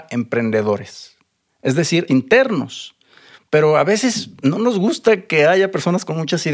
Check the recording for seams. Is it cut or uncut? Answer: cut